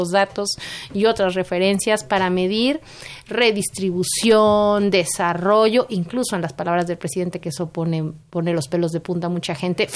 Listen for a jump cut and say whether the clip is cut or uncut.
uncut